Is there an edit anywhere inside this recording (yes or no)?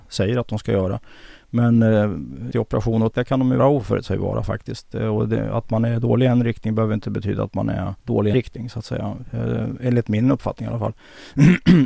yes